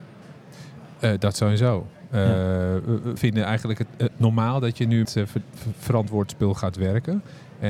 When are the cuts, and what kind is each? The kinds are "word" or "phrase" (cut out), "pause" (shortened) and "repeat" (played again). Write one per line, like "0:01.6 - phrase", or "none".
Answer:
0:03.2 - word
0:04.1 - word
0:05.0 - word